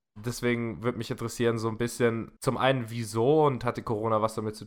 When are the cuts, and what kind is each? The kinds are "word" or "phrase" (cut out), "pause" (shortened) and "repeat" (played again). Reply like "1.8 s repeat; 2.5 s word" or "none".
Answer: 2.4 s pause